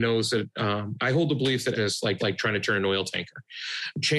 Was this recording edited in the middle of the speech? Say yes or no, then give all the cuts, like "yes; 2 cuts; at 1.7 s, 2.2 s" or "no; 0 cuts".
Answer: yes; 3 cuts; at 1.0 s, 1.7 s, 2.2 s